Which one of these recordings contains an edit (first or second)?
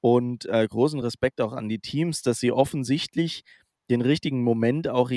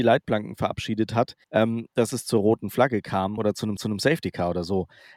second